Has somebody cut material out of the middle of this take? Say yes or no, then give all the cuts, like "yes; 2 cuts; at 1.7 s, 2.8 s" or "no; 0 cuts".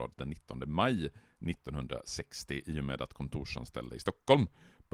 no; 0 cuts